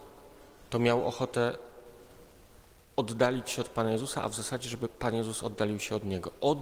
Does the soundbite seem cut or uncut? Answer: uncut